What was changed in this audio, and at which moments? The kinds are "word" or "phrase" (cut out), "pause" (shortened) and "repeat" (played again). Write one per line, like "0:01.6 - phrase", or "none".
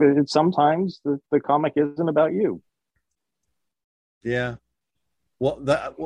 none